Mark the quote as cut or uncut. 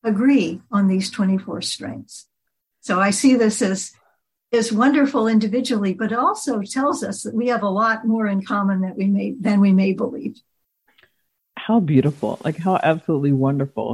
uncut